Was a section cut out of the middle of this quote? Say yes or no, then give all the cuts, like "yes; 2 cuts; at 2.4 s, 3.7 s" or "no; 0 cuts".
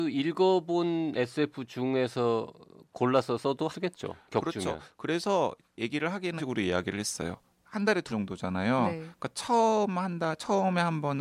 yes; 4 cuts; at 3.7 s, 5.6 s, 6.4 s, 8.1 s